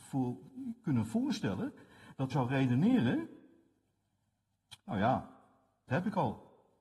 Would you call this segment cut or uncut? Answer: cut